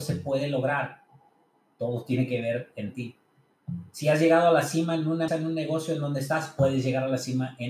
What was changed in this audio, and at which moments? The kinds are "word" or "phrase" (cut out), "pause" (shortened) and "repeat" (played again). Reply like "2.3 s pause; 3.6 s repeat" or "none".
5.3 s word